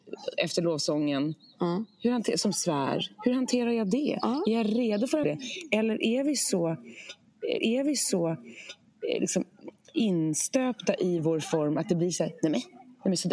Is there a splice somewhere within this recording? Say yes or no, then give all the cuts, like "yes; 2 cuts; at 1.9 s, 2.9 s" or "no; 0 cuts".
yes; 2 cuts; at 5.2 s, 7.6 s